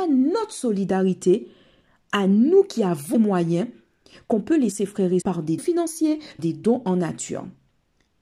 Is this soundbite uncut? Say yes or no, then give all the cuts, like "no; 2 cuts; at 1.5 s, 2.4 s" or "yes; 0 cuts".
no; 5 cuts; at 3.1 s, 4.7 s, 5.2 s, 5.6 s, 6.4 s